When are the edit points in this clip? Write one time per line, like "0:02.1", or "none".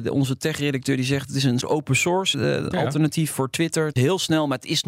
0:01.6
0:02.3
0:03.3
0:03.9